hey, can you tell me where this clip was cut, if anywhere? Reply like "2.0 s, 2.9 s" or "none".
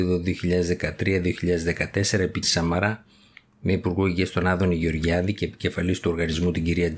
2.4 s